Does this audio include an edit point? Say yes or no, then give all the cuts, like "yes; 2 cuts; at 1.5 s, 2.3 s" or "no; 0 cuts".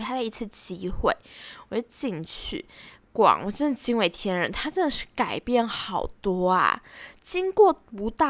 no; 0 cuts